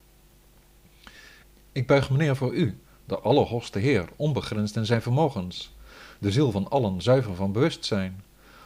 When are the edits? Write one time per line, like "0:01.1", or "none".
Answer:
none